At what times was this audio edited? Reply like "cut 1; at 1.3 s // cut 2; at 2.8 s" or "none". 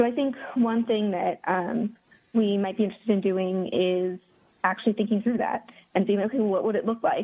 none